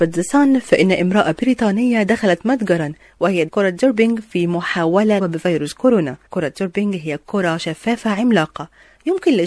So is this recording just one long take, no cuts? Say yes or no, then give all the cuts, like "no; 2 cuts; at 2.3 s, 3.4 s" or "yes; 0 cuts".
no; 3 cuts; at 3.5 s, 5.2 s, 6.3 s